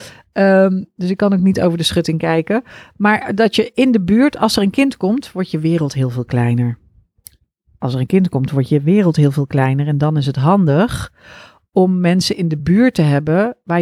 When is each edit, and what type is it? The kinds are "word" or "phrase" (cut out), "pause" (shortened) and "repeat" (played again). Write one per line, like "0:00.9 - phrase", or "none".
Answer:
none